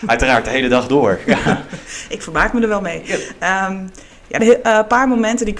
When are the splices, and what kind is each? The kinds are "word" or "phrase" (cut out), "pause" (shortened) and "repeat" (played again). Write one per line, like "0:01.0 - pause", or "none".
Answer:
0:04.4 - word